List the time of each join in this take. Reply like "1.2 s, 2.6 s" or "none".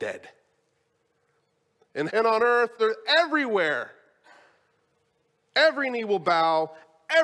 2.1 s, 2.8 s